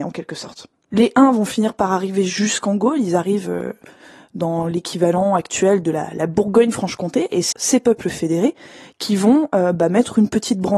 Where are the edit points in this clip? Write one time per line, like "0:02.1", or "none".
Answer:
0:07.5